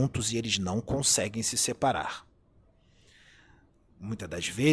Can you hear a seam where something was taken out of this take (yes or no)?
no